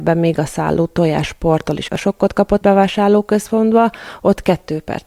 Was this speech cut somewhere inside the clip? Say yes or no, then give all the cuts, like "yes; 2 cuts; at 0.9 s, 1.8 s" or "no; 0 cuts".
yes; 2 cuts; at 1.9 s, 2.6 s